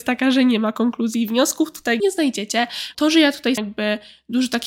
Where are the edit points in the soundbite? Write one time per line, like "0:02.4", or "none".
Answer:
0:02.0
0:02.9
0:03.6